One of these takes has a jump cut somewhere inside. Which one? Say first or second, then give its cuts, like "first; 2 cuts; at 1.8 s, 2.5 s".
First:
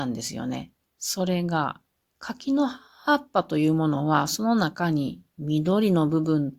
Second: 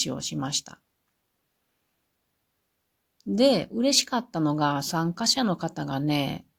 first; 1 cut; at 1.9 s